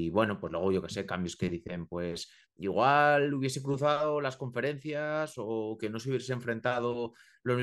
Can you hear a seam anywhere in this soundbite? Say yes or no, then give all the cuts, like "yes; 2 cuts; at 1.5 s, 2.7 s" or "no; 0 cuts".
no; 0 cuts